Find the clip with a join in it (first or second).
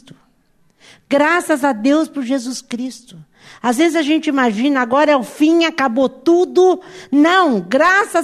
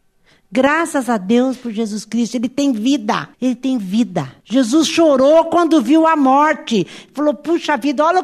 second